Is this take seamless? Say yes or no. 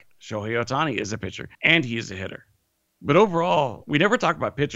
no